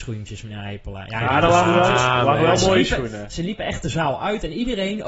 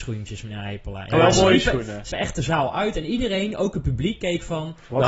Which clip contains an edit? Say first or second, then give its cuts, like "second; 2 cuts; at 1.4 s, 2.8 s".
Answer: second; 2 cuts; at 1.1 s, 2.1 s